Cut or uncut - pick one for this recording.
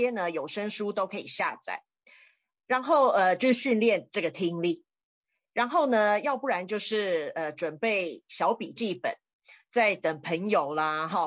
uncut